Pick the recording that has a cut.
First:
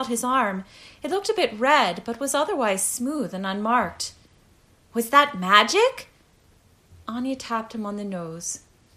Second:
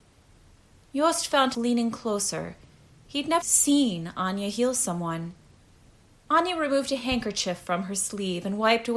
second; 2 cuts; at 1.5 s, 3.4 s

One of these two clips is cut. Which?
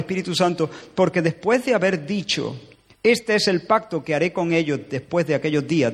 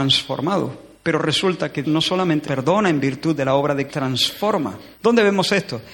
second; 4 cuts; at 1.8 s, 2.4 s, 3.9 s, 4.9 s

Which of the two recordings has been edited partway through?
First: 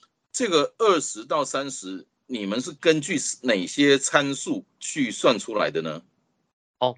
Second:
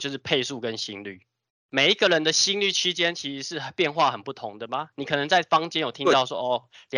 first; 1 cut; at 4.7 s

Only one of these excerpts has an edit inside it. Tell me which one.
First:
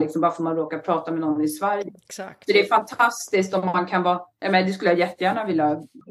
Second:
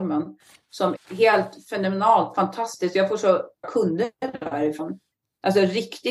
second; 2 cuts; at 0.9 s, 3.6 s

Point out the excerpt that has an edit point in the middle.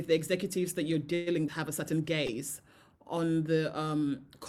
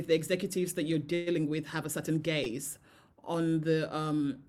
first; 1 cut; at 1.5 s

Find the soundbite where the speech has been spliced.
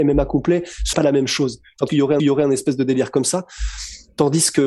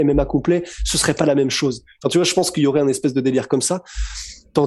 first; 3 cuts; at 0.9 s, 1.9 s, 2.2 s

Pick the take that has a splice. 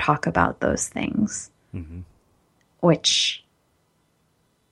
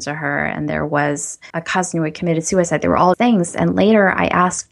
second; 2 cuts; at 1.5 s, 3.1 s

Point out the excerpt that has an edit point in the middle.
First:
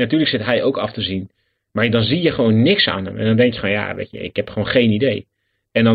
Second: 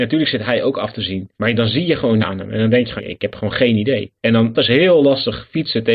second; 5 cuts; at 1.3 s, 2.2 s, 3.0 s, 4.2 s, 4.5 s

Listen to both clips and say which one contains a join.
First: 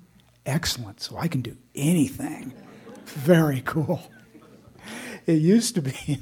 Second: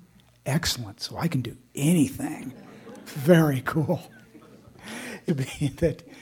second; 1 cut; at 5.3 s

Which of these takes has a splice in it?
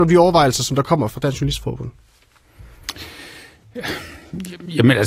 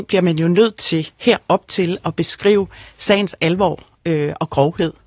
first; 1 cut; at 1.1 s

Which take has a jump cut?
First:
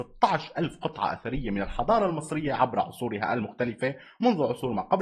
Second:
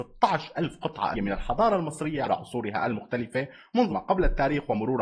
second; 3 cuts; at 1.1 s, 2.2 s, 3.9 s

